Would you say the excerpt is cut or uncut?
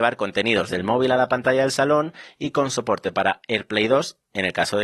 uncut